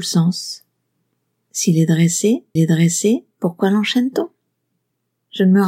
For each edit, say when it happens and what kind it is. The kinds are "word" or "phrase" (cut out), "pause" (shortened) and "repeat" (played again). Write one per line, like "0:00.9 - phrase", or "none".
0:02.6 - repeat